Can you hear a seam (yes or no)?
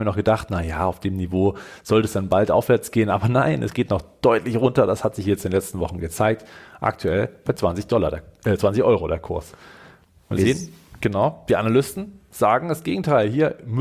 no